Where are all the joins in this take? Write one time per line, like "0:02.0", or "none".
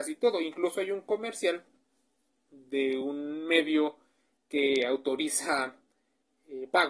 none